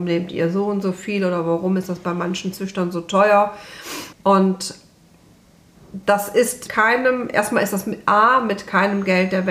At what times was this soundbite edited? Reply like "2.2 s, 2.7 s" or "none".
4.1 s, 6.7 s

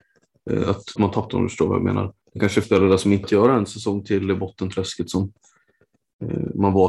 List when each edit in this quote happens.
1.0 s, 1.3 s, 2.2 s, 2.6 s, 3.2 s

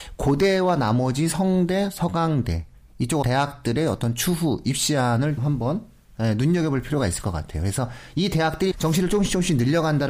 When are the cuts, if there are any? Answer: 3.2 s, 5.4 s, 8.7 s

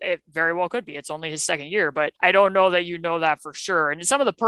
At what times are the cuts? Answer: 2.2 s

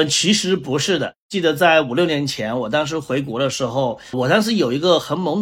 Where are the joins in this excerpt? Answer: 4.1 s

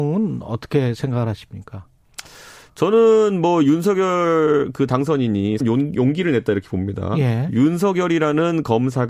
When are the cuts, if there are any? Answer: 5.6 s

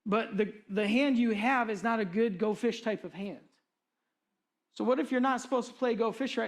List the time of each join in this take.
none

